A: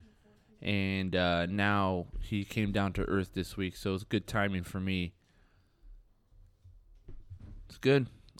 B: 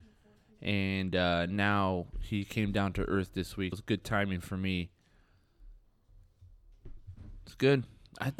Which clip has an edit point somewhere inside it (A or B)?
B